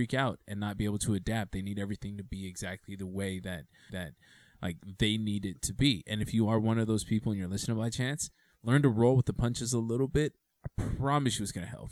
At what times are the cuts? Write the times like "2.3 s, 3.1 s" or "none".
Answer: 3.9 s